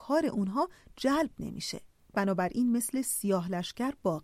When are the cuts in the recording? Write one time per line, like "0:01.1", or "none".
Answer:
none